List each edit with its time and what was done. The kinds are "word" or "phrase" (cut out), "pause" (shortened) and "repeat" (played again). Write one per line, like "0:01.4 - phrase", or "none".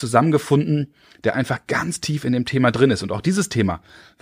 none